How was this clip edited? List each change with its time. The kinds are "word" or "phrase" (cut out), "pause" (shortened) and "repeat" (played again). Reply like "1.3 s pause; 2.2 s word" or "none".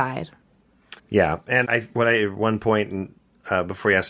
1.0 s pause; 1.6 s word